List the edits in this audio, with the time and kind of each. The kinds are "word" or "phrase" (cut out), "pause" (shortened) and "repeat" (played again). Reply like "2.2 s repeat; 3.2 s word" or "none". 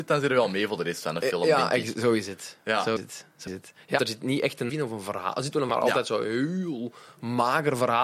3.0 s word; 3.5 s word; 4.0 s word; 4.7 s word; 5.7 s word